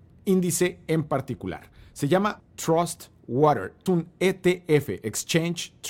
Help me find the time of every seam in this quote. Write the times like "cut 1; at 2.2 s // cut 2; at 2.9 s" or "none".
cut 1; at 2.4 s // cut 2; at 3.9 s